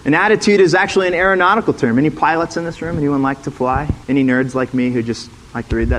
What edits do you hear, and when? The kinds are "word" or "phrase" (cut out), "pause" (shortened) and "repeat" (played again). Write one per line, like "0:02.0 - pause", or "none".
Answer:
0:04.0 - pause